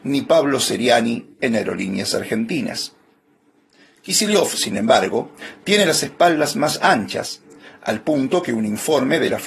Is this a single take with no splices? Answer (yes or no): yes